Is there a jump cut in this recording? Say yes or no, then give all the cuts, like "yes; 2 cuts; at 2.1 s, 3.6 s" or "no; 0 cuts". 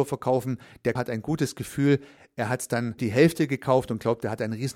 yes; 2 cuts; at 1.0 s, 3.0 s